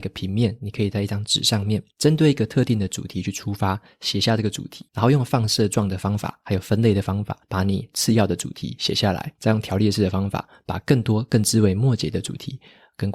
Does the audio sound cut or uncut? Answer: cut